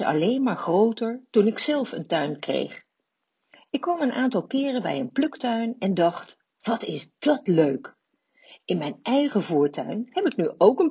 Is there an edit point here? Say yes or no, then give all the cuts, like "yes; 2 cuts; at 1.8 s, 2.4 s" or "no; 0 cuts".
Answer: no; 0 cuts